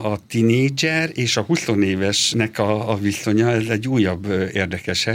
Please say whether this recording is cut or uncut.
uncut